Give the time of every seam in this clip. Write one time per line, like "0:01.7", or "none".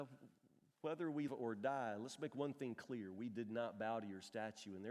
0:01.3